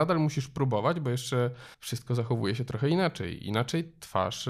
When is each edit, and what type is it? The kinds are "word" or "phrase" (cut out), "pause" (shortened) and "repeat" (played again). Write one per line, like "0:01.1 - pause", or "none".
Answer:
0:01.7 - pause